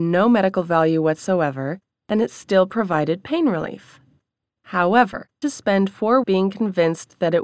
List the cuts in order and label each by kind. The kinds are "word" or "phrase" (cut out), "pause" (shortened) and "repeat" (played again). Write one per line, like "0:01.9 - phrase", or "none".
0:05.4 - phrase
0:06.2 - word